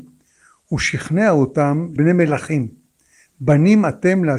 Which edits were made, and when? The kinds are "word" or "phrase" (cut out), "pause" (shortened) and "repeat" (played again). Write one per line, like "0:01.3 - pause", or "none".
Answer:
0:02.0 - word